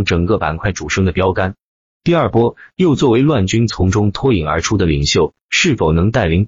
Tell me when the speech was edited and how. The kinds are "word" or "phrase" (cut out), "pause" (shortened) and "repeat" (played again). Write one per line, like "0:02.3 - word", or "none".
none

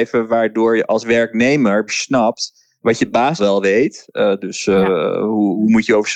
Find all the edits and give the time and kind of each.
0:01.9 - word
0:03.4 - word

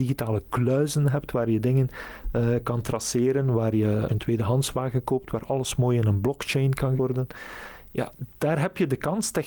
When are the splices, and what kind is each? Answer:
0:04.1 - word
0:07.0 - word
0:08.3 - pause

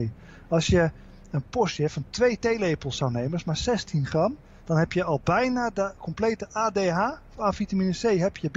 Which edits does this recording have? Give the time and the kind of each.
none

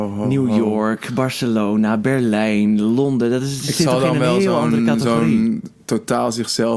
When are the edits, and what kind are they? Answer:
none

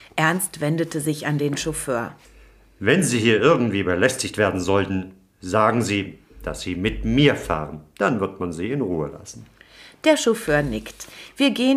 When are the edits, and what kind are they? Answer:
none

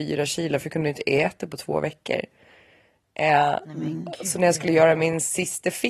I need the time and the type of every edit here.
none

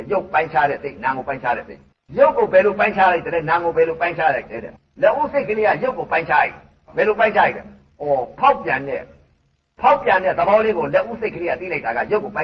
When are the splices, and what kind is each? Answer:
0:01.9 - pause
0:04.8 - pause

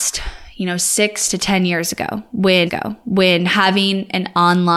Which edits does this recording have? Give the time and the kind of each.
0:02.7 - repeat

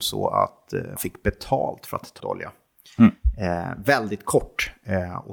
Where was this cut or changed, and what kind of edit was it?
0:01.0 - word
0:02.2 - word

